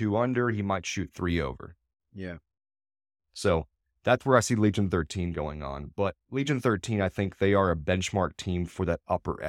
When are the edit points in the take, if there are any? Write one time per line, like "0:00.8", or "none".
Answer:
0:02.0